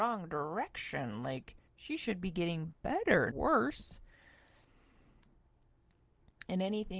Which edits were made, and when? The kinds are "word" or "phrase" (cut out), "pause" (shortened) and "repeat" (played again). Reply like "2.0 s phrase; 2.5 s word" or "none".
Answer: 1.7 s pause; 3.3 s word